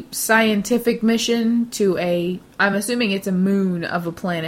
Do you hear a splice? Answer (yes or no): no